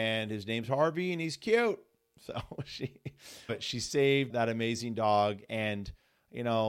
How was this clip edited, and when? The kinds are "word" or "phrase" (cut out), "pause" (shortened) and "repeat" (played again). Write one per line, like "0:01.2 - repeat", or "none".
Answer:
0:03.5 - word
0:04.3 - word